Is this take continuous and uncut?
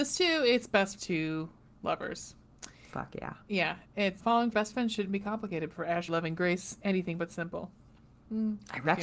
no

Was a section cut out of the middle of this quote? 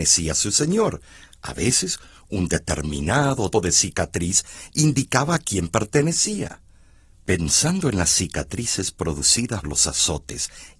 yes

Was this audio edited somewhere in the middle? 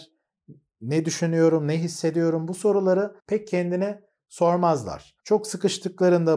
yes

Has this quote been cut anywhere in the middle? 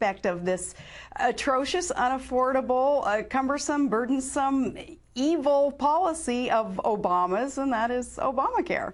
no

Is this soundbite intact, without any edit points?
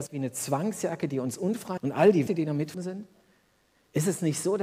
no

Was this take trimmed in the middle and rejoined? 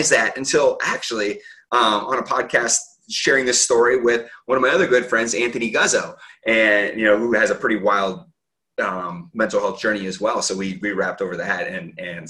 no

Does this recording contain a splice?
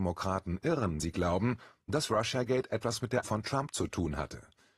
yes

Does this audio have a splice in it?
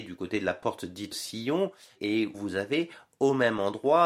yes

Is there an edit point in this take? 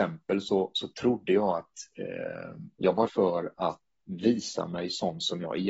yes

